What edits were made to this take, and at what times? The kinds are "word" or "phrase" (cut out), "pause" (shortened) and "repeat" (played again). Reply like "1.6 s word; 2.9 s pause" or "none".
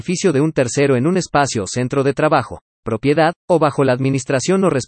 3.4 s pause